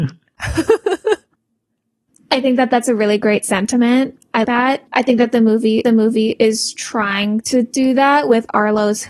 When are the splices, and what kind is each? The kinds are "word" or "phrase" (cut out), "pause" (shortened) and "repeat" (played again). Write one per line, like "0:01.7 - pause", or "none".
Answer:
0:04.4 - word
0:04.9 - pause
0:05.8 - repeat